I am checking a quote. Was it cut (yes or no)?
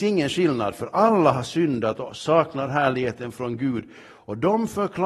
no